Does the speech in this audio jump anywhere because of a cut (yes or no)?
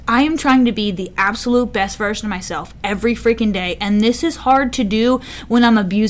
no